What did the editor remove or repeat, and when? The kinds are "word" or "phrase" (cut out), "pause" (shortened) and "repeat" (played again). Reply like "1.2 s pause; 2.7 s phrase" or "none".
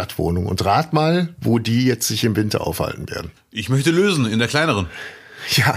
3.4 s pause